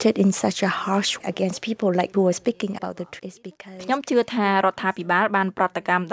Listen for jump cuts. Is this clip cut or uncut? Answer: cut